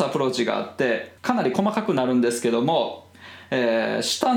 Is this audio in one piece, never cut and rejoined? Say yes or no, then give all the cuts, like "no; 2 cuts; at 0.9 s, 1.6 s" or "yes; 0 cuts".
no; 1 cut; at 1.2 s